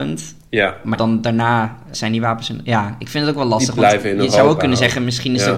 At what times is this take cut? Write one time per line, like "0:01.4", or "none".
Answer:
0:00.9
0:01.9